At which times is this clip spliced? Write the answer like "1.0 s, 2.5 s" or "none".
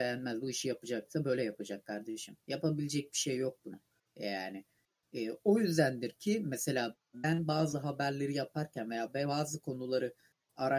2.4 s, 4.1 s